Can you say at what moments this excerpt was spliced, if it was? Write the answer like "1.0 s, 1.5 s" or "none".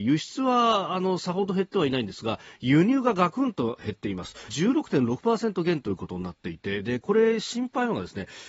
4.5 s